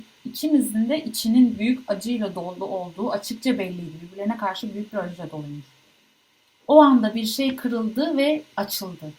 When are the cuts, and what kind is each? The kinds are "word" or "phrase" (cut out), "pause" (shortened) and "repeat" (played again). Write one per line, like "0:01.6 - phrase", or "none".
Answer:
none